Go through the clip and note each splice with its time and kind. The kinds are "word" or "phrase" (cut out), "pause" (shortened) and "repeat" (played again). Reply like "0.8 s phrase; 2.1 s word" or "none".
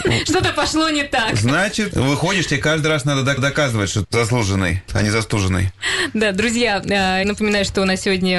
1.9 s word; 3.4 s repeat; 4.0 s word; 4.9 s word; 7.2 s word